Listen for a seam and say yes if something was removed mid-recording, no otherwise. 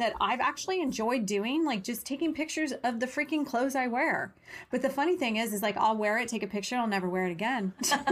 no